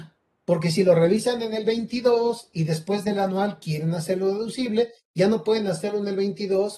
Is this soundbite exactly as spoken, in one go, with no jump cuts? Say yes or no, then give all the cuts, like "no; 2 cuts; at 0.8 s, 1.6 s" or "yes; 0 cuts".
yes; 0 cuts